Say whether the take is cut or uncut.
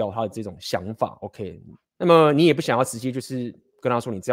cut